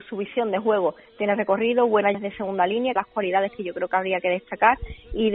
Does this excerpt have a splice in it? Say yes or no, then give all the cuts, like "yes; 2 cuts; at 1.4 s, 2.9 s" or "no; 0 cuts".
yes; 2 cuts; at 2.1 s, 3.0 s